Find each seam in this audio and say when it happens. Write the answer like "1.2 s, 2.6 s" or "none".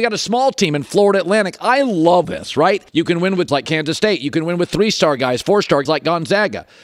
2.2 s, 2.9 s, 3.5 s, 5.9 s